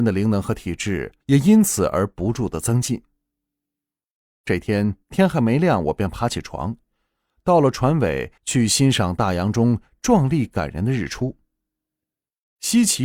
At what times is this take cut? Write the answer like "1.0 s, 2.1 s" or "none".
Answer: 1.2 s, 5.0 s, 8.4 s